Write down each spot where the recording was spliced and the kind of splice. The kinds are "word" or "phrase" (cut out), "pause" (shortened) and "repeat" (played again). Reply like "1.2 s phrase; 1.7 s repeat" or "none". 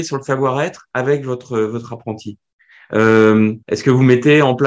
3.6 s pause